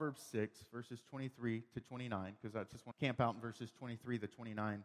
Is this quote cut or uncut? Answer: cut